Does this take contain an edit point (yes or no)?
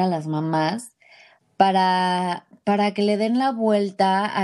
no